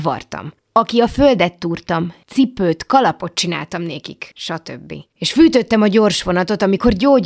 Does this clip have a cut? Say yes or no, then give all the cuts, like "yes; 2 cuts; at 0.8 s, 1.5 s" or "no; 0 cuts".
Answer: no; 0 cuts